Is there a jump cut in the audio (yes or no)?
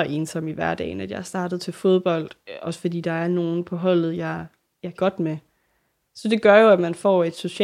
yes